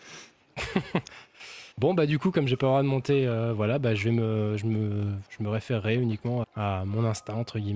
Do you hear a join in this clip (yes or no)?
yes